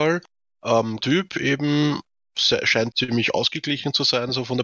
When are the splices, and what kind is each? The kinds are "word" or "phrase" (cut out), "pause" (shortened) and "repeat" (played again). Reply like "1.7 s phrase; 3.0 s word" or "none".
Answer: 1.0 s word; 2.9 s word